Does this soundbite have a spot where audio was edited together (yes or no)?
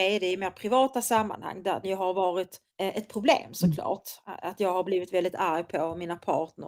yes